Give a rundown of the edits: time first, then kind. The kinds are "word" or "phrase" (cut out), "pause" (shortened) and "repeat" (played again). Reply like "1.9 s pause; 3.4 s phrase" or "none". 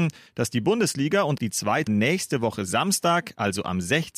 1.4 s word; 1.9 s word